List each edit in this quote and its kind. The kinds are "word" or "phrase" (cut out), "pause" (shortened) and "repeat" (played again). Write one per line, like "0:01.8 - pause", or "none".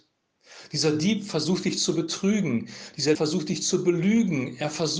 0:03.1 - word